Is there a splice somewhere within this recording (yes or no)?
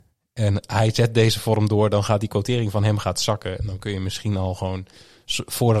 no